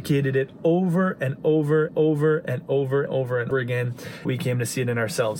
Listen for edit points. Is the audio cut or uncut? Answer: cut